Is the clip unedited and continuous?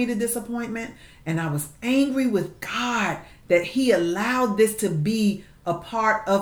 yes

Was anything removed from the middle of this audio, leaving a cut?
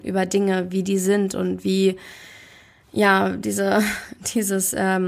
no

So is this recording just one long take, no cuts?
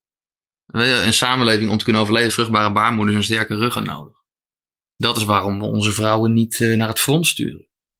no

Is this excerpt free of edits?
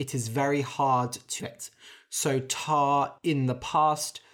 no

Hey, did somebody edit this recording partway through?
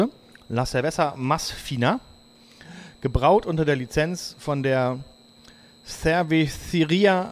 no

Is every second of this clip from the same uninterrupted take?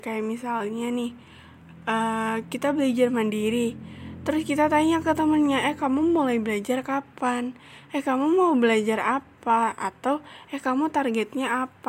yes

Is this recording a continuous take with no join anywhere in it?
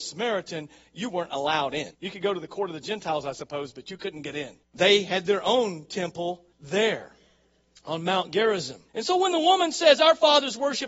no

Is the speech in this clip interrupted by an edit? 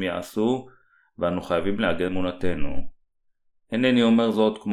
yes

